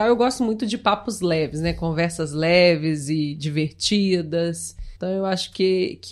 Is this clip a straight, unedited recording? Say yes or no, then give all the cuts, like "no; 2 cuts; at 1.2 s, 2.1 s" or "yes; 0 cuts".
no; 1 cut; at 5.0 s